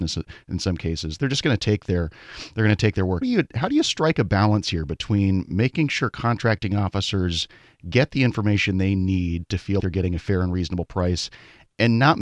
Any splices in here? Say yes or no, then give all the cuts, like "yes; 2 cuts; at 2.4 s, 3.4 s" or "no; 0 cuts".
yes; 2 cuts; at 3.2 s, 9.8 s